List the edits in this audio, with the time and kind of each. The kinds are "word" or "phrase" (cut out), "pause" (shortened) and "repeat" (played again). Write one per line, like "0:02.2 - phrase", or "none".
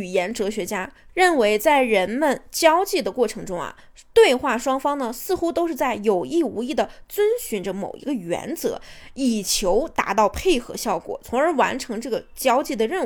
0:01.1 - word